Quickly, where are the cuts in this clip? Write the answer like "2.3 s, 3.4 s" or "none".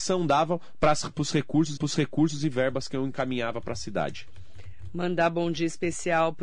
1.8 s